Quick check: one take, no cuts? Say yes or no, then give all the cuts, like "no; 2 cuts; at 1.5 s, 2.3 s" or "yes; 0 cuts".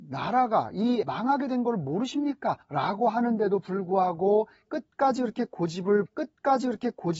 no; 3 cuts; at 1.0 s, 2.6 s, 6.1 s